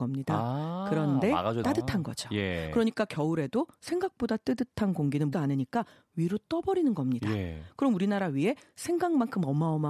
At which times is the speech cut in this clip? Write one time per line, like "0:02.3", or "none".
0:01.6
0:05.3